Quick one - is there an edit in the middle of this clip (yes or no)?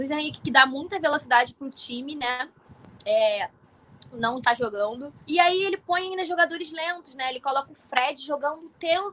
yes